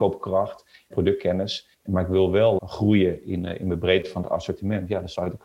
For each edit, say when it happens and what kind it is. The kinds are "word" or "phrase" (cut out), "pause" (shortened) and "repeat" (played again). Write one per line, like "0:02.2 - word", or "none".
0:00.9 - word
0:01.7 - pause
0:02.6 - word